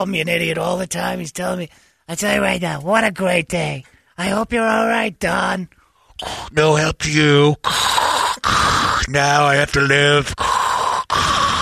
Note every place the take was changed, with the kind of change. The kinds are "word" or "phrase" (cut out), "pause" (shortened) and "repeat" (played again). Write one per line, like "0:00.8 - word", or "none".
none